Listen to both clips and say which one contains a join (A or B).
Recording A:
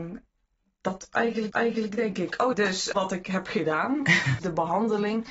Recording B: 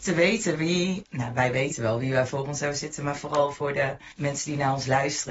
A